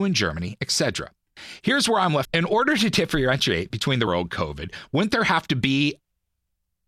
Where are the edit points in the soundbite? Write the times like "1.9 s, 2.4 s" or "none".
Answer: 2.2 s, 4.1 s